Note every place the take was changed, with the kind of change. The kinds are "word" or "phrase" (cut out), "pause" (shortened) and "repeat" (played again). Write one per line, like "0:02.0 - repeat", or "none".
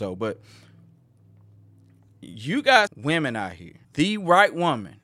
0:02.9 - word
0:03.8 - pause